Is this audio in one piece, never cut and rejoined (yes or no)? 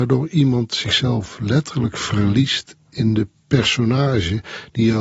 yes